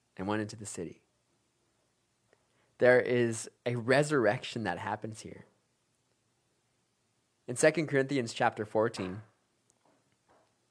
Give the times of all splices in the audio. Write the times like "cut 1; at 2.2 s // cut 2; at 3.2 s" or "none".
cut 1; at 3.6 s